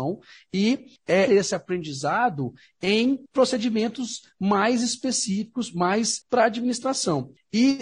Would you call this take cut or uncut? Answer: cut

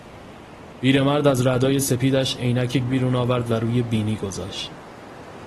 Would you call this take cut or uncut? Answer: cut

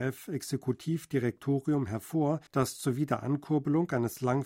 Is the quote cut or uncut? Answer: cut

